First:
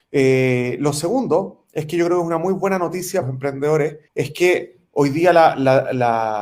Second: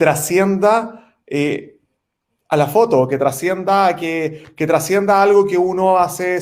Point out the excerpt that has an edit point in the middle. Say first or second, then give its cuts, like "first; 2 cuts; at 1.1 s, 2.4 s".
first; 2 cuts; at 3.2 s, 4.1 s